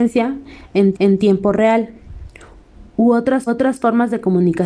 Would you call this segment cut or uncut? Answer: cut